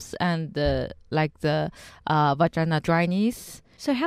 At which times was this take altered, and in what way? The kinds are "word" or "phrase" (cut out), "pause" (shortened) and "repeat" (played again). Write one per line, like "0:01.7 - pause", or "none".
none